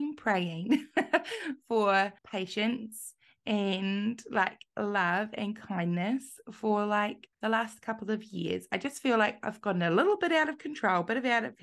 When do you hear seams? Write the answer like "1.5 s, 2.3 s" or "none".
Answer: 2.2 s, 7.3 s